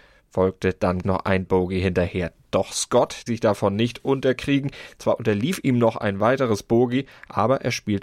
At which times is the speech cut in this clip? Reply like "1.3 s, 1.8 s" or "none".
1.0 s, 1.5 s, 3.3 s